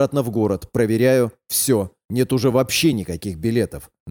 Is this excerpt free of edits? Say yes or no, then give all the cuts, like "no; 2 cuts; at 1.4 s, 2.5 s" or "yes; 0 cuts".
yes; 0 cuts